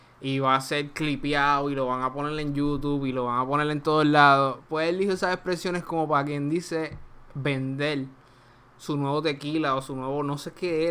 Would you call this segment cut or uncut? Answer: uncut